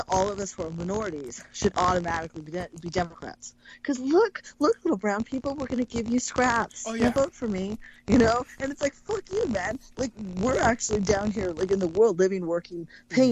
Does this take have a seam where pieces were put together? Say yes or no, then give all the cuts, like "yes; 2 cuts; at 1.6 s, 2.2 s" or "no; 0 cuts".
no; 0 cuts